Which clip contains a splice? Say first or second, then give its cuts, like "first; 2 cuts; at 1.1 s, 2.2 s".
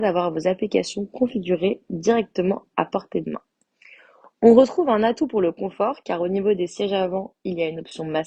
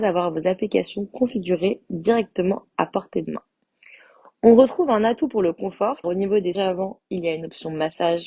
second; 2 cuts; at 6.0 s, 6.5 s